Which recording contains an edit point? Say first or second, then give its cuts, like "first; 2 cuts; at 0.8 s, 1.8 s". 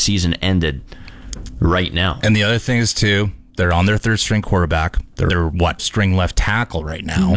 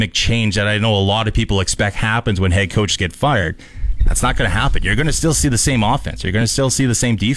first; 2 cuts; at 5.3 s, 5.8 s